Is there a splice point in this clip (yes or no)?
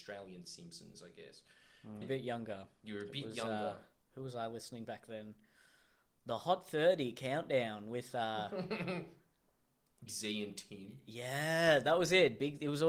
yes